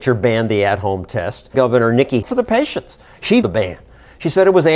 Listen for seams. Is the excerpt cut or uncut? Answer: cut